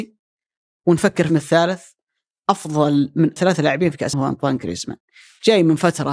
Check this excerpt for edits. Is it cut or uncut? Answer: cut